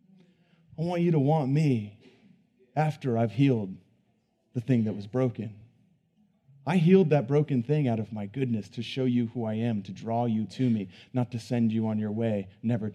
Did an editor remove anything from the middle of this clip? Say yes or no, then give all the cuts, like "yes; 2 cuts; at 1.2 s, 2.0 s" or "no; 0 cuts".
no; 0 cuts